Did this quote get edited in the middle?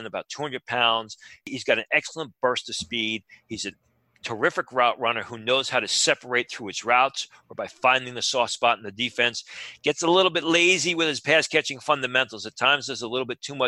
no; 0 cuts

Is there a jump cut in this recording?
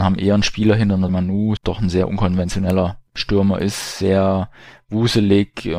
yes; 3 cuts; at 1.1 s, 1.6 s, 3.1 s

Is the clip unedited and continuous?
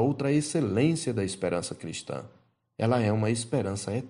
yes; 0 cuts

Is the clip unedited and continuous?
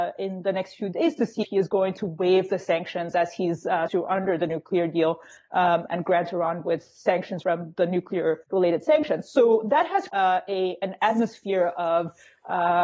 no; 6 cuts; at 1.4 s, 3.9 s, 5.9 s, 7.4 s, 8.4 s, 10.1 s

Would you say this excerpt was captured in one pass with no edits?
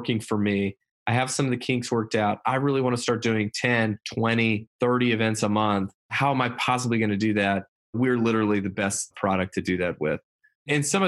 no; 1 cut; at 4.0 s

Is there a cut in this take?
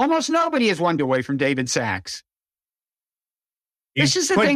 yes; 1 cut; at 1.0 s

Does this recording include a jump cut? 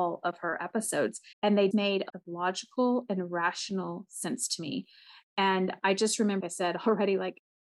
yes; 4 cuts; at 1.3 s, 1.7 s, 2.1 s, 6.4 s

